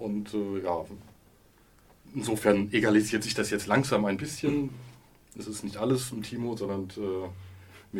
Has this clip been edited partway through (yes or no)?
no